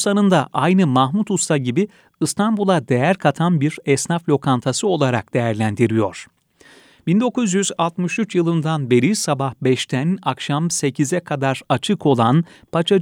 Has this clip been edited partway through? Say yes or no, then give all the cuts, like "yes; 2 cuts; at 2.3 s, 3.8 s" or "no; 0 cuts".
no; 0 cuts